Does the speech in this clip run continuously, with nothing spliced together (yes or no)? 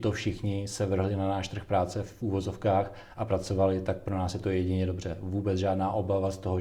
yes